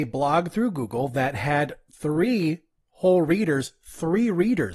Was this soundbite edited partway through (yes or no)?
no